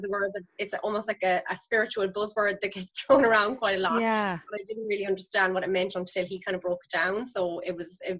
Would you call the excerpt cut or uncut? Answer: uncut